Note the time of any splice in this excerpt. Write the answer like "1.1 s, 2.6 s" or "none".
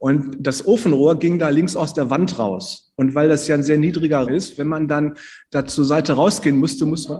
4.3 s